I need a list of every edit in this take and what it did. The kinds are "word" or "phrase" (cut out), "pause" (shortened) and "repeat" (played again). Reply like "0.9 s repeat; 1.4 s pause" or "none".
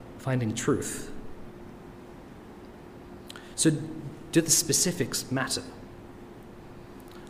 none